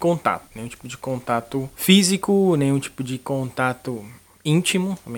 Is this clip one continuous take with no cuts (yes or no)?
yes